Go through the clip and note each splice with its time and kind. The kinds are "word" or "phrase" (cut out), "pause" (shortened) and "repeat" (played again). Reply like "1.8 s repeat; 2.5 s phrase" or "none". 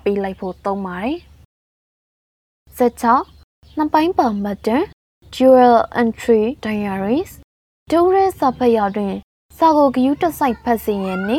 none